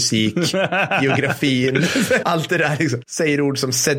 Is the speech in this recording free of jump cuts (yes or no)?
no